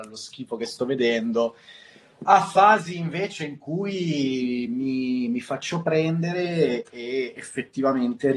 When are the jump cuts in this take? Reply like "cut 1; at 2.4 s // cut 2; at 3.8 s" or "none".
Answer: none